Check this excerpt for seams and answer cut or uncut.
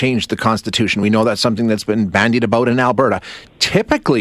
uncut